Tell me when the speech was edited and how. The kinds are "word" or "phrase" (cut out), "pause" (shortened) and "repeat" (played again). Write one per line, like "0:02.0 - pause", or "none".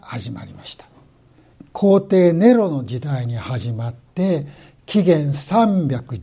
none